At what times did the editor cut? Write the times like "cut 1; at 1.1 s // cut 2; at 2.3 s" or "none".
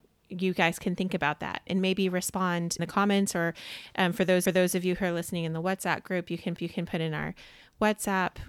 cut 1; at 1.7 s // cut 2; at 2.8 s // cut 3; at 4.5 s // cut 4; at 6.6 s

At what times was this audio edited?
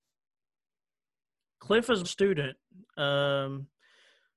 cut 1; at 2.0 s

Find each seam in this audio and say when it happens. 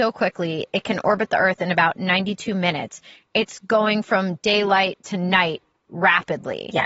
none

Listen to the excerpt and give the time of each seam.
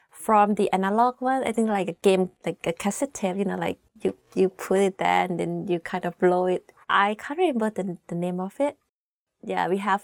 cut 1; at 6.8 s

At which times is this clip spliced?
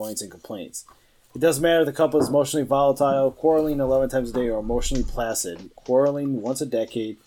none

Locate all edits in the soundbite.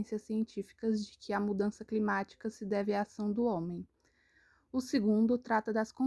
none

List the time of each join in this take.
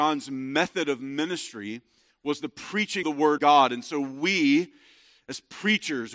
cut 1; at 3.0 s // cut 2; at 3.4 s

